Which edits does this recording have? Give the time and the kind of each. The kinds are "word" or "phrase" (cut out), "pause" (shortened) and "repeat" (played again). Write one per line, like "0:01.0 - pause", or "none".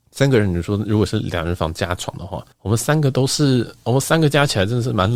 0:02.5 - pause